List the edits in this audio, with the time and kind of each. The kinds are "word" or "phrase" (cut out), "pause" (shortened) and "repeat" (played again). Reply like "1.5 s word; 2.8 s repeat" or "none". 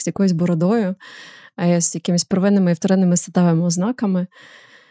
none